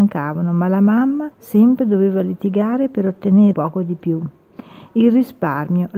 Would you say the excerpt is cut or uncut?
cut